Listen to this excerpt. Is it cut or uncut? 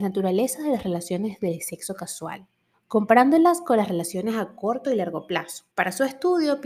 cut